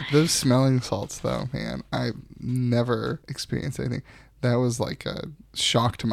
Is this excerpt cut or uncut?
uncut